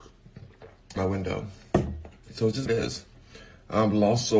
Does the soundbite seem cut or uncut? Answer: cut